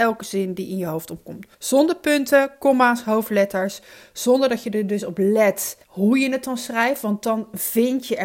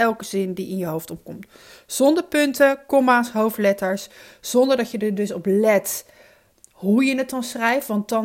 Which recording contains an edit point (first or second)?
first